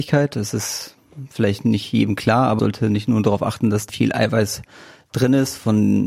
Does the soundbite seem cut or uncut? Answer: cut